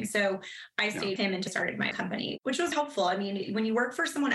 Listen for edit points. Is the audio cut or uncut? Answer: cut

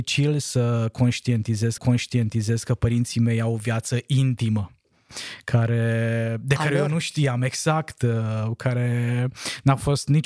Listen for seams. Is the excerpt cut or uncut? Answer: cut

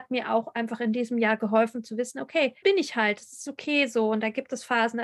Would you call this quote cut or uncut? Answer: cut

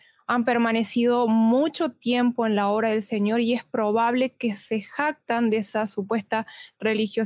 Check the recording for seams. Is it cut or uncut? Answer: uncut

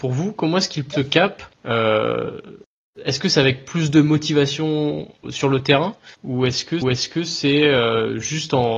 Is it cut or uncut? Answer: cut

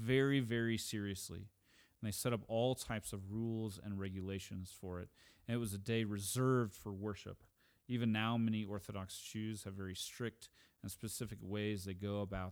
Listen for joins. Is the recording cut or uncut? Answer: uncut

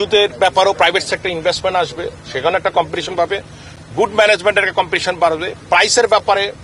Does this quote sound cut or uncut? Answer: uncut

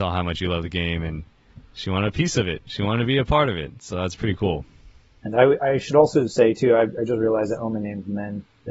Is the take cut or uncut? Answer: uncut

